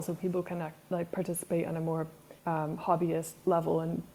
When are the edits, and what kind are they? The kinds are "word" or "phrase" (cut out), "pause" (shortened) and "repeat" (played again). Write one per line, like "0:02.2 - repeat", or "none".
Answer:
0:02.4 - pause

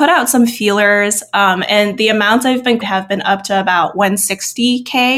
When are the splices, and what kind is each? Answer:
0:02.8 - word

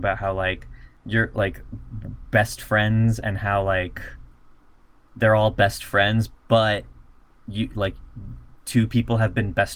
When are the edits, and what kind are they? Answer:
none

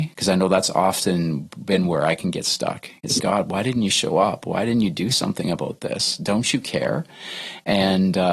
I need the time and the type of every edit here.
0:03.2 - word

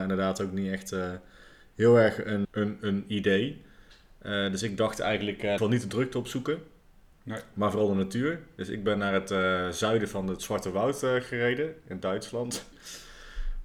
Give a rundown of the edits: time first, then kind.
0:02.4 - word
0:05.6 - phrase

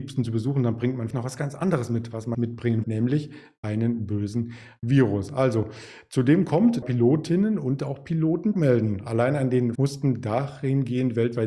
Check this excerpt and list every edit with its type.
0:01.1 - word
0:02.3 - word
0:02.8 - word
0:06.8 - phrase
0:08.5 - word
0:09.8 - word

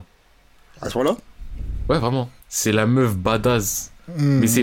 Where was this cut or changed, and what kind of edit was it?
0:02.4 - pause

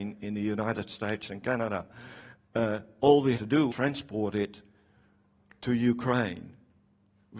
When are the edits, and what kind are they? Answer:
0:03.3 - word
0:03.7 - word

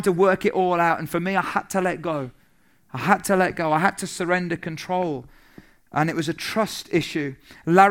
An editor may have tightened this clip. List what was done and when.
none

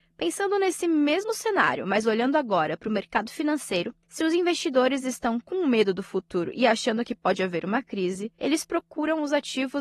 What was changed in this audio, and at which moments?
0:04.0 - pause
0:08.3 - pause

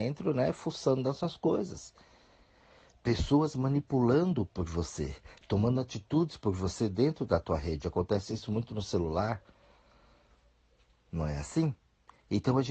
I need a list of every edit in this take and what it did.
none

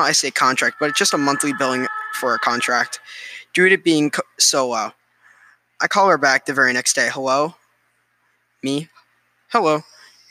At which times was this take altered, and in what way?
none

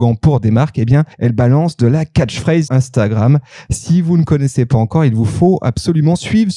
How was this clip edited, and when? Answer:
0:01.1 - pause
0:02.7 - word

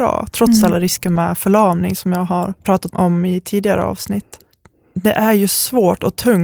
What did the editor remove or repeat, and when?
0:02.6 - pause

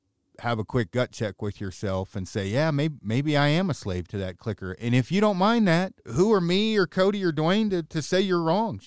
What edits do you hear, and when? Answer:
0:06.0 - pause

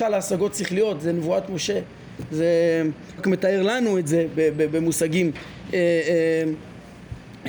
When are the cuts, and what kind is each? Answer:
0:03.2 - word

